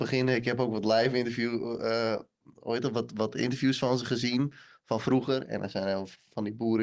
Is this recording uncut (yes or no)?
yes